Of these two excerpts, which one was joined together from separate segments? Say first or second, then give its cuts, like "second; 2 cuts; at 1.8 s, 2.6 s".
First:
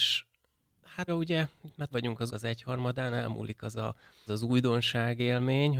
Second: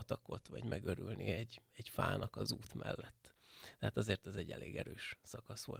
first; 4 cuts; at 1.1 s, 1.9 s, 2.3 s, 4.3 s